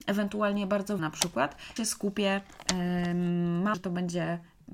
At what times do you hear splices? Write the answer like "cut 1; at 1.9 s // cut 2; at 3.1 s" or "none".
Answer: cut 1; at 1.0 s // cut 2; at 1.8 s // cut 3; at 3.7 s